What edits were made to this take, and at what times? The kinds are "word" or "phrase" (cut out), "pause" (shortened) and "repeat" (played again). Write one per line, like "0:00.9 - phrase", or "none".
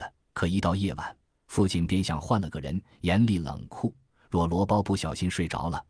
none